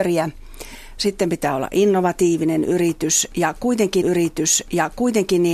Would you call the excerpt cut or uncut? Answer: cut